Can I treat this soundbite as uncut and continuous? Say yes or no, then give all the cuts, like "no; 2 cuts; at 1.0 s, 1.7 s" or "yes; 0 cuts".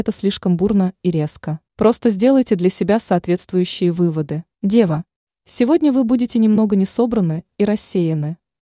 no; 2 cuts; at 1.7 s, 4.5 s